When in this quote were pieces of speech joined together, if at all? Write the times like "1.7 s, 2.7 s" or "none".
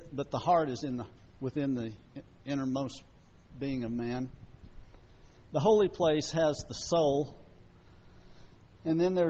none